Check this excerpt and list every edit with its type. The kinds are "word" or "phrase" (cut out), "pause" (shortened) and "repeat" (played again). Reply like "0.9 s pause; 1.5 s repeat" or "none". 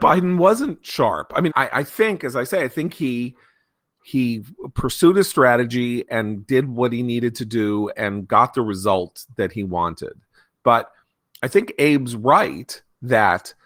1.5 s word

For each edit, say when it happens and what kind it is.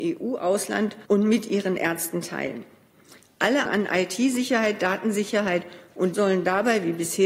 1.1 s pause; 3.7 s word; 6.1 s word

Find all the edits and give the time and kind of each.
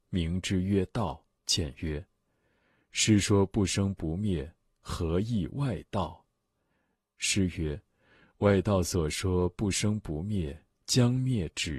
1.4 s pause

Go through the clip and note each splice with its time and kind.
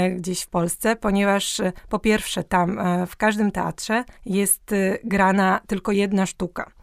4.2 s pause

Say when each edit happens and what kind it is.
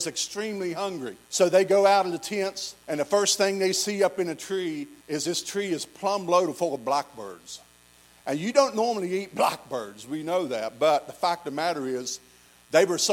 1.2 s pause; 2.8 s pause; 5.0 s pause

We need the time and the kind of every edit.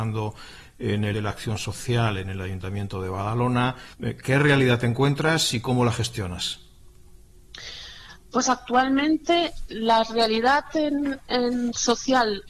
1.1 s phrase; 3.9 s pause; 9.7 s word

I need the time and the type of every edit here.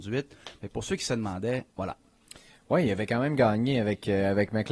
1.7 s pause

